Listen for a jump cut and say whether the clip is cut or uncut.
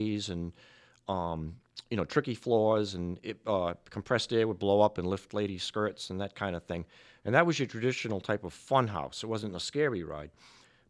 uncut